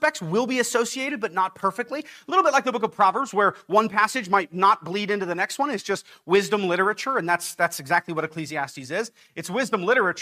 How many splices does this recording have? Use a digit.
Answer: 0